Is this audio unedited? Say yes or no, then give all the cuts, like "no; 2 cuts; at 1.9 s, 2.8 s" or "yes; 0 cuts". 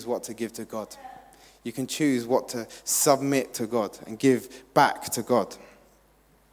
yes; 0 cuts